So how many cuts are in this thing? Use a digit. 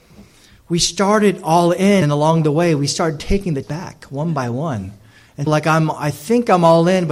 3